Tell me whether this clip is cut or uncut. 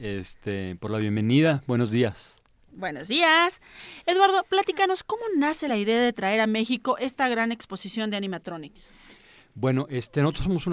uncut